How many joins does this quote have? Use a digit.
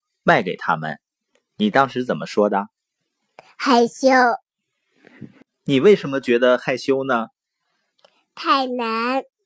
0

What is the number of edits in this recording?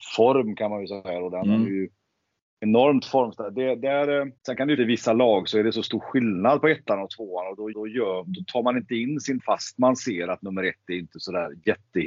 4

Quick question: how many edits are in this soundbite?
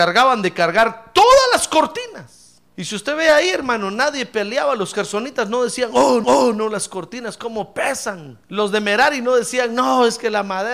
3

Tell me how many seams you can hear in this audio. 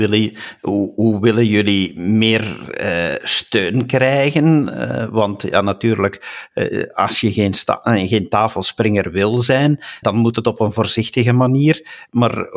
1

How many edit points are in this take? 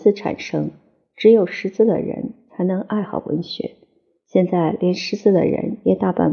0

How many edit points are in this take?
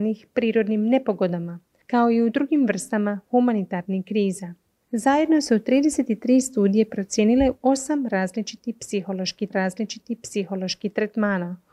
2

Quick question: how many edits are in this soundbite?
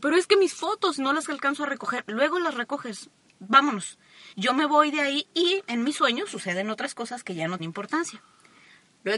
2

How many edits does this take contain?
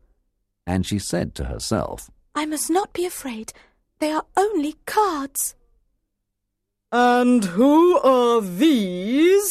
0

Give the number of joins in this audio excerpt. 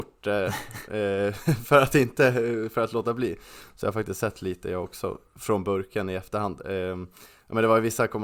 0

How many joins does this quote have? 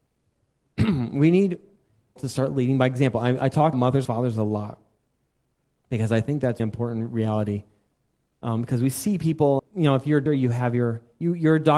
6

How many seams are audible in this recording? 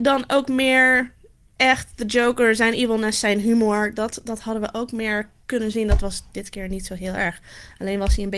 0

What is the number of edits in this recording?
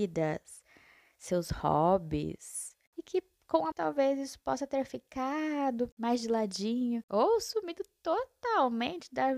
1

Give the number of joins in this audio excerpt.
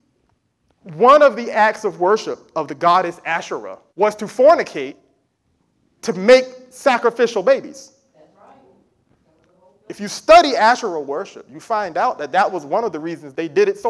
1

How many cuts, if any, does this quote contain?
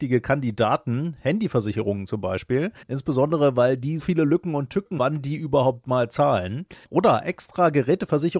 4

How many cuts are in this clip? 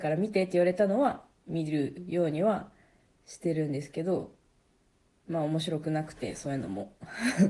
0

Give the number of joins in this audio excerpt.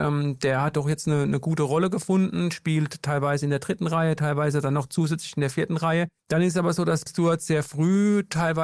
2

